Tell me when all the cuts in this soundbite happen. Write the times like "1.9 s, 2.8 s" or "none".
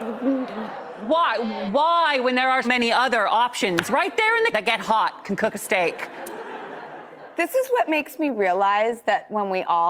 1.7 s, 2.6 s, 4.5 s